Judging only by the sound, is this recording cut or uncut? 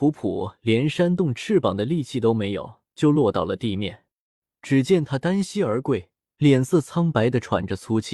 cut